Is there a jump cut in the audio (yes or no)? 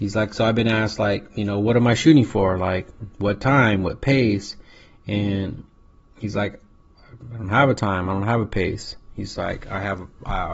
no